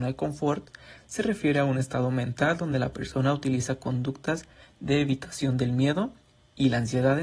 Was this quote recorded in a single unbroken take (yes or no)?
yes